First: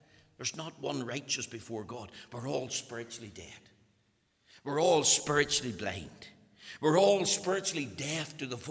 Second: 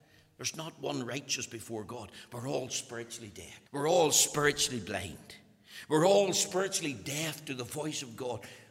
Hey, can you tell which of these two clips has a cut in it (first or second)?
second